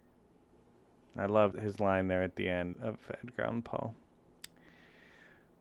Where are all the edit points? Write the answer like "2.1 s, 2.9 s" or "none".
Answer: 1.5 s, 2.7 s